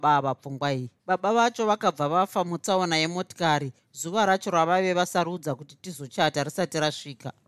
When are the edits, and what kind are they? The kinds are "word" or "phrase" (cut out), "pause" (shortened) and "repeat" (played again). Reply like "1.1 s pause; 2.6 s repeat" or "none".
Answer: 1.0 s pause